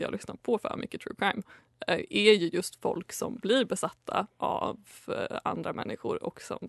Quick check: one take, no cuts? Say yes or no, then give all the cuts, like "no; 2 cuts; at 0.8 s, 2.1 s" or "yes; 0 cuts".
yes; 0 cuts